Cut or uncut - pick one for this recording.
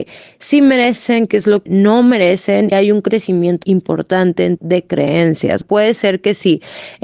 cut